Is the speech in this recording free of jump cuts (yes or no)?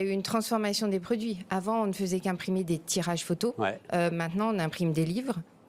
yes